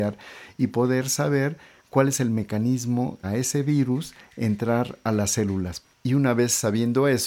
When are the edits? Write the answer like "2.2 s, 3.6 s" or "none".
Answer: 3.2 s